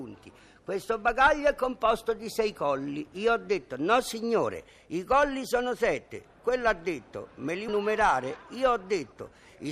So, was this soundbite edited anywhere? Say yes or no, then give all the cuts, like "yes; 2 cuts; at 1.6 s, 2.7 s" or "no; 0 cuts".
yes; 1 cut; at 7.7 s